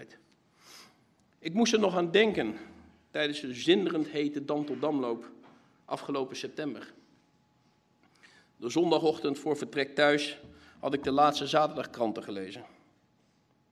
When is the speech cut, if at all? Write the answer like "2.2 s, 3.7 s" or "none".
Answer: none